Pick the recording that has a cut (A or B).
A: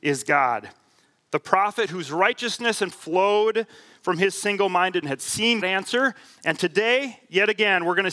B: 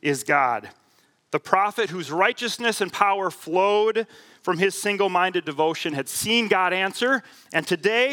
A